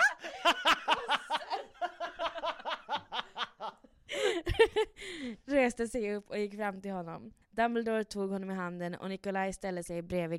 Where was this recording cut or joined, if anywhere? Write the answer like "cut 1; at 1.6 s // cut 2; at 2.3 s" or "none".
cut 1; at 7.4 s

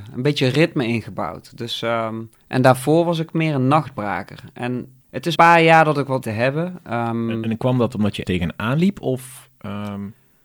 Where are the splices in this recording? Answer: cut 1; at 2.4 s // cut 2; at 5.0 s // cut 3; at 5.3 s // cut 4; at 6.2 s // cut 5; at 8.2 s

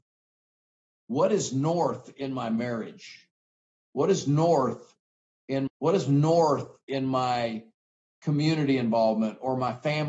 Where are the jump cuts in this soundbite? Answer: cut 1; at 5.7 s

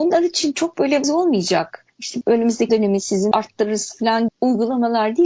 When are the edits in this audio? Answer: cut 1; at 1.0 s // cut 2; at 2.2 s // cut 3; at 2.7 s // cut 4; at 3.3 s // cut 5; at 4.3 s

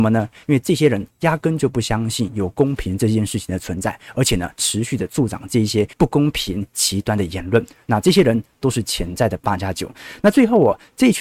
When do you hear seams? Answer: cut 1; at 1.1 s // cut 2; at 5.9 s

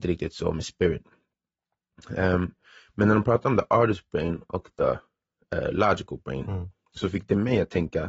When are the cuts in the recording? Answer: none

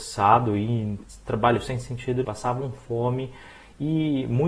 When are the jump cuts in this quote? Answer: cut 1; at 2.2 s

